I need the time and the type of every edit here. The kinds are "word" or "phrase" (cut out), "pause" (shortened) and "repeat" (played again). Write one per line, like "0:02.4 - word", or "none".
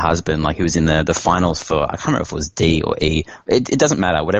none